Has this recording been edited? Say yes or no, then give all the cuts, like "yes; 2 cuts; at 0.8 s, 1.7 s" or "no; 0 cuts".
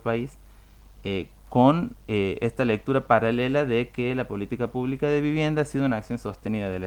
no; 0 cuts